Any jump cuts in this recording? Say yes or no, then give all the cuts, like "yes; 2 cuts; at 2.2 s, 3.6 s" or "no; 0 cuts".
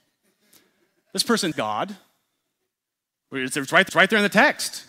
yes; 2 cuts; at 1.5 s, 3.9 s